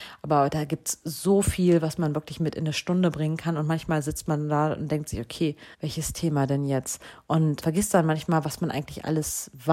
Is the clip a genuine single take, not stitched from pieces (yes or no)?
no